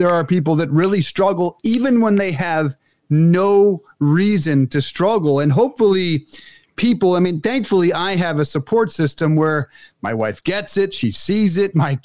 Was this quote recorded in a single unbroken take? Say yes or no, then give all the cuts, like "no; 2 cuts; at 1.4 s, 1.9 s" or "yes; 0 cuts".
yes; 0 cuts